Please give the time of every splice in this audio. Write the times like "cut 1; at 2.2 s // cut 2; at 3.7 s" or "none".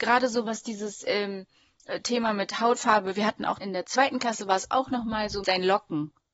cut 1; at 3.6 s // cut 2; at 5.4 s

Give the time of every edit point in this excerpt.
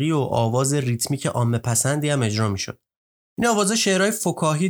none

